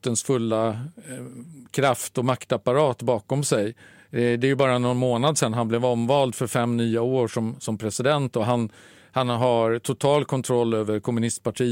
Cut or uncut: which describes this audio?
uncut